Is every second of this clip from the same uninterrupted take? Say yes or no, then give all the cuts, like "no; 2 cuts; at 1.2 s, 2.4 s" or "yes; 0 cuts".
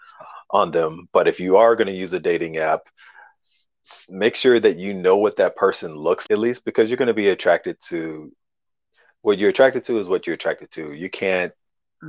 no; 1 cut; at 6.3 s